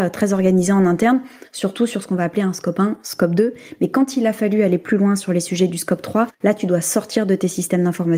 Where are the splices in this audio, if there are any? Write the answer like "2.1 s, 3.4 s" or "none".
6.3 s